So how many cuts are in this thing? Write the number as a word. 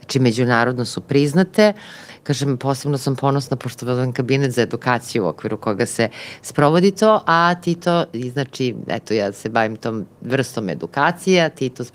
zero